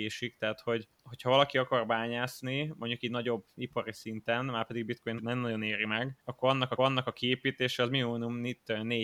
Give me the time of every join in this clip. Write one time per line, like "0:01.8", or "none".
0:00.9
0:03.6
0:05.2
0:06.2
0:06.8

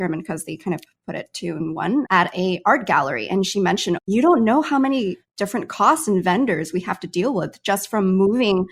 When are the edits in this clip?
0:02.0

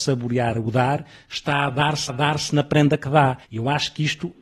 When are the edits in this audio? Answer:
0:02.1
0:03.4

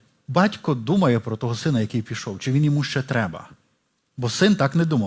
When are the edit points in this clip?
none

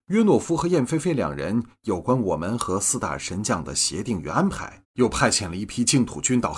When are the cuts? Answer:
0:04.8

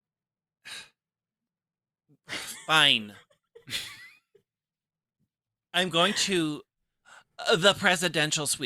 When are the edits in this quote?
none

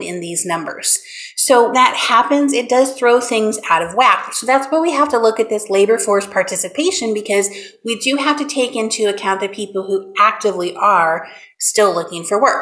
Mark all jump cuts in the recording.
0:01.7

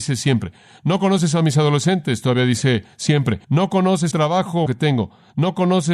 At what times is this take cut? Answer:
0:03.4
0:04.1
0:04.7

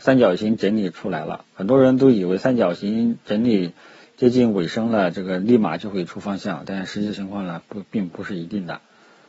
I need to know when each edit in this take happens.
none

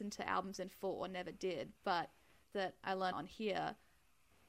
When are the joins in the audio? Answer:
0:01.8
0:02.5
0:03.1

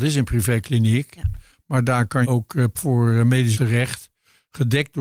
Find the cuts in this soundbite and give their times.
0:02.2
0:02.7
0:03.5

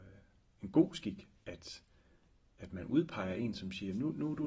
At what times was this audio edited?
0:01.4

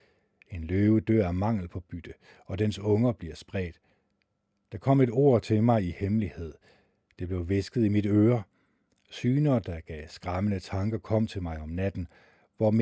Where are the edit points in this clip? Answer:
none

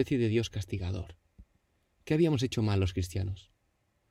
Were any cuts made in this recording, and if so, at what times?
none

